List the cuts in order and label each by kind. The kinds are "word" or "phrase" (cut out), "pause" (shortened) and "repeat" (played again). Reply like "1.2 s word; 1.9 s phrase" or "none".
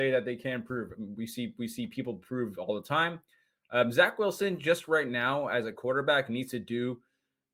none